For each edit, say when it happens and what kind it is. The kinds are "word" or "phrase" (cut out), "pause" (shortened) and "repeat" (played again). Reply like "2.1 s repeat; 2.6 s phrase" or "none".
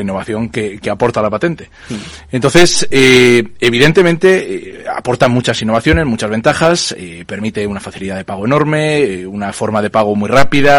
none